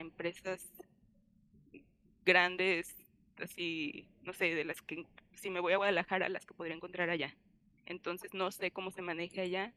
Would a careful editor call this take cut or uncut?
uncut